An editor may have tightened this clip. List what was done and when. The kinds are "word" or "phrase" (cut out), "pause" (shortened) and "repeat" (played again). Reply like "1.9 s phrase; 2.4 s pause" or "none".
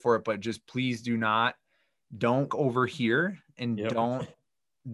2.5 s word